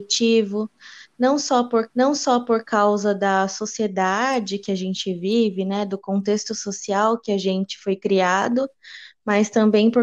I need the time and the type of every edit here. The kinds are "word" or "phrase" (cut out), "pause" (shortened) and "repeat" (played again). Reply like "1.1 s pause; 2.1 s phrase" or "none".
1.9 s repeat